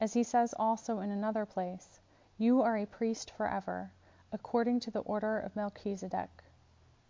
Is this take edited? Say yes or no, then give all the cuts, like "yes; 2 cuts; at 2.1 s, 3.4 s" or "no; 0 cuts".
no; 0 cuts